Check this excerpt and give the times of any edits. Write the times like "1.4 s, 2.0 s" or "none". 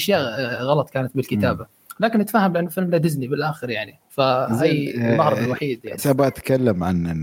6.0 s